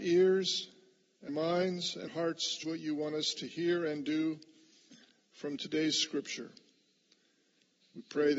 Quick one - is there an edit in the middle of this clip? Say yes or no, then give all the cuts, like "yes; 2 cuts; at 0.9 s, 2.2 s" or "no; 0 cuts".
yes; 3 cuts; at 1.3 s, 2.1 s, 2.6 s